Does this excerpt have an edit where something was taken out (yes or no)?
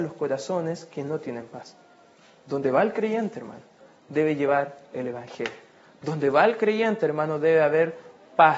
no